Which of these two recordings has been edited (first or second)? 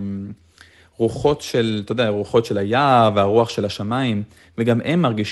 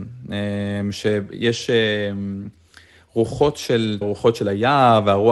second